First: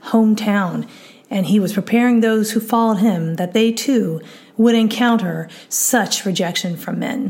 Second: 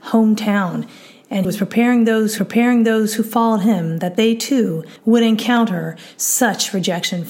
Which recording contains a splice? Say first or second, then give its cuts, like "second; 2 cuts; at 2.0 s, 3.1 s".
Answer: second; 3 cuts; at 1.4 s, 2.4 s, 5.0 s